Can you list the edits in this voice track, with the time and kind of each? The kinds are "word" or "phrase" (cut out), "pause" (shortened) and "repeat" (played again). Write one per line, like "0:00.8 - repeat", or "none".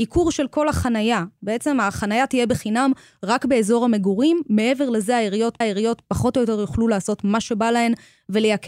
0:05.6 - repeat